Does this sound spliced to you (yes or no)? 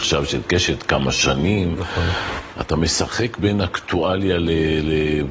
no